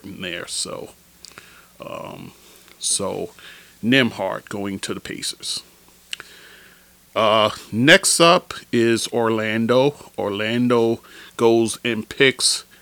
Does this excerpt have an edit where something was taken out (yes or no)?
no